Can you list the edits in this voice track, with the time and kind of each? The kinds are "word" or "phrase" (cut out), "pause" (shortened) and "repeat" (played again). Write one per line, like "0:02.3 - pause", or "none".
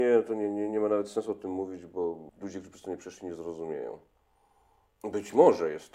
none